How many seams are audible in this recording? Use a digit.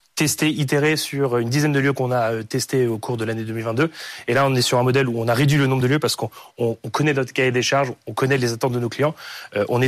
0